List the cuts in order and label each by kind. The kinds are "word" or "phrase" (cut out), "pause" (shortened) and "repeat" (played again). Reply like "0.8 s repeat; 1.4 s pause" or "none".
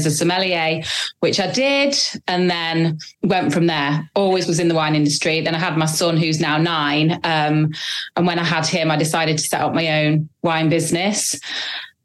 3.1 s pause; 10.3 s pause